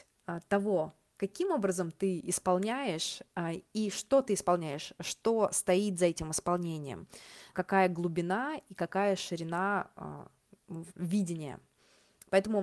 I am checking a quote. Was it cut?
yes; 1 cut; at 7.5 s

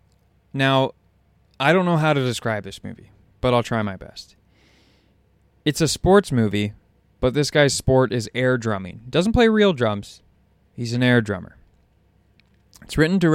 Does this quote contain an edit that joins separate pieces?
no; 0 cuts

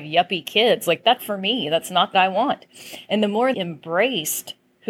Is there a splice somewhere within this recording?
yes; 3 cuts; at 1.2 s, 2.1 s, 3.5 s

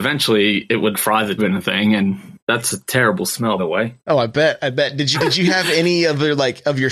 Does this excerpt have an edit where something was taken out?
yes; 5 cuts; at 0.9 s, 1.4 s, 2.4 s, 3.6 s, 5.1 s

